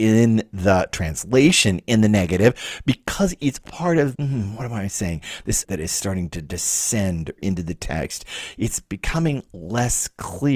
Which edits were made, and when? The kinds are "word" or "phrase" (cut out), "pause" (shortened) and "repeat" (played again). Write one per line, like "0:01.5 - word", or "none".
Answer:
0:03.7 - word
0:04.2 - word
0:05.6 - word
0:07.4 - phrase

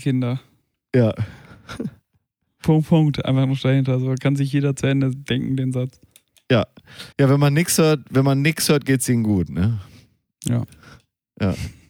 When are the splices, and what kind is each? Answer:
0:02.6 - word
0:07.1 - pause

